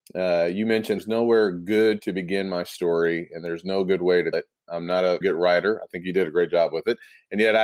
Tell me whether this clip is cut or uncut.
cut